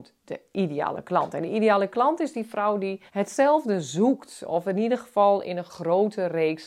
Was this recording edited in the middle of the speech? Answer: yes; 1 cut; at 3.1 s

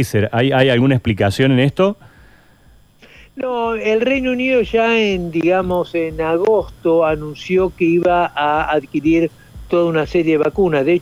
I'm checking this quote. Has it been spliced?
no; 0 cuts

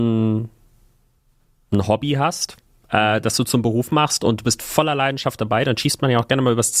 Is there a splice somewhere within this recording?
no; 0 cuts

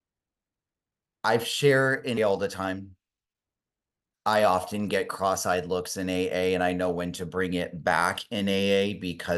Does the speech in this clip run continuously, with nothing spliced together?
no; 1 cut; at 2.2 s

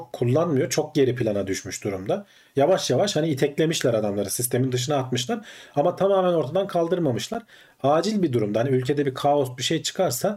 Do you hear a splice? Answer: no; 0 cuts

